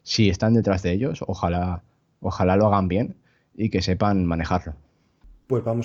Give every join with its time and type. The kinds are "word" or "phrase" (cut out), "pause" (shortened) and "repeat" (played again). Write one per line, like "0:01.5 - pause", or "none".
none